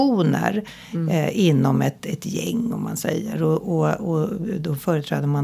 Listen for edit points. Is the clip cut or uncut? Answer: uncut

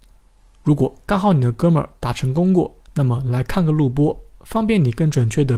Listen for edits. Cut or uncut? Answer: cut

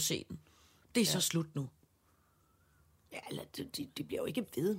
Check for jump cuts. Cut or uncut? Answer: uncut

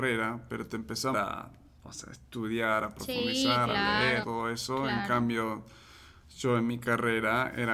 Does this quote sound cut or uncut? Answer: cut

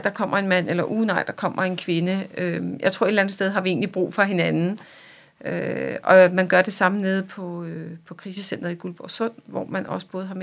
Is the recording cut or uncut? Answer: uncut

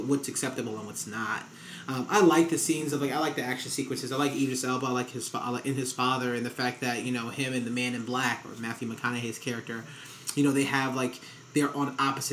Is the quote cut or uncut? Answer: uncut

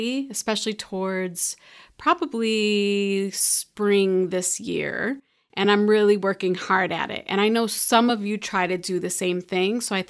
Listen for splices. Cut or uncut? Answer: uncut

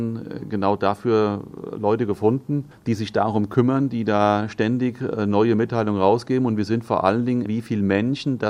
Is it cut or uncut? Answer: cut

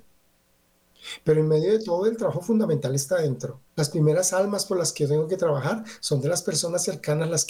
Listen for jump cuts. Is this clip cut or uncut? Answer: cut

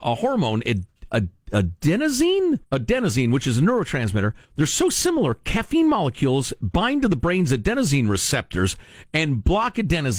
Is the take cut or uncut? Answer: cut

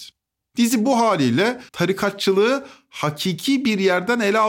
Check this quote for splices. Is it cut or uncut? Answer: cut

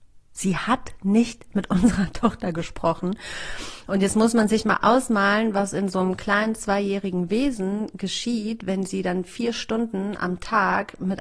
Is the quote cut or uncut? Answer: uncut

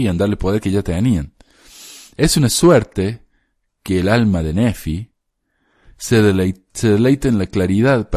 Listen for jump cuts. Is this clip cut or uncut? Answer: uncut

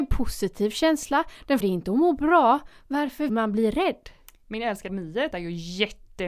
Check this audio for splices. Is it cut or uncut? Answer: cut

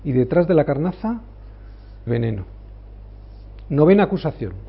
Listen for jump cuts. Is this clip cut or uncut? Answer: cut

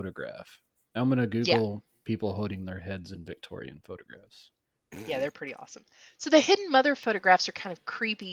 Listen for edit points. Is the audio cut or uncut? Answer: uncut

